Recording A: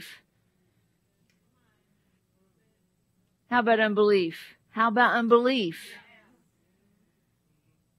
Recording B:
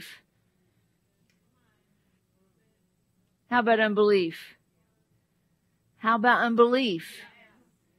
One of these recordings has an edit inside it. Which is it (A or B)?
A